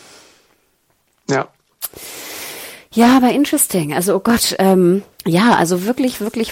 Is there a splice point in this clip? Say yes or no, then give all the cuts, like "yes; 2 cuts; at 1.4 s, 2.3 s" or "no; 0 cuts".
yes; 1 cut; at 5.1 s